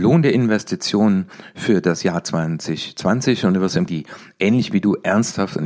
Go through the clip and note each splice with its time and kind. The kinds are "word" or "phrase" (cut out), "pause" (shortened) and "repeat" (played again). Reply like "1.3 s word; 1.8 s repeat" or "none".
3.9 s phrase